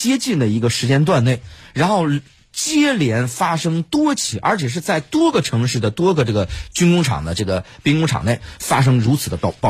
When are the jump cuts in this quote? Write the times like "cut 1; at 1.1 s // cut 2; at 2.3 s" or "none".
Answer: none